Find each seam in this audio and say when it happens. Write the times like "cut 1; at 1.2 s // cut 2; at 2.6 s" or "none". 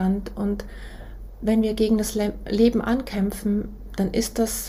none